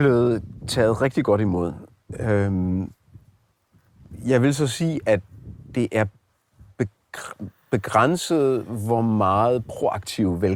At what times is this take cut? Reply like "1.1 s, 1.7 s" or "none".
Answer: none